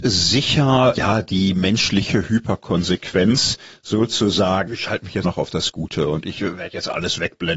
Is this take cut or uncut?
cut